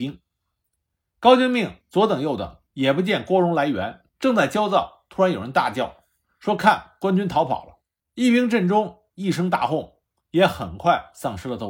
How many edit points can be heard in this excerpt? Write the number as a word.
three